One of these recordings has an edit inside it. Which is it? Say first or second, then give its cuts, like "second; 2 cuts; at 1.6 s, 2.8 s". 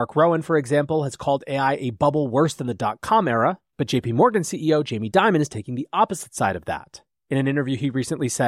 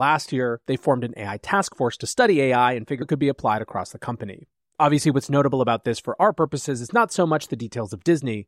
second; 1 cut; at 3.0 s